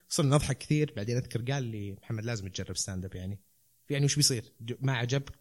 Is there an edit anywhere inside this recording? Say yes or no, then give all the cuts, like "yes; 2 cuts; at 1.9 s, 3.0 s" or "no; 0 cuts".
no; 0 cuts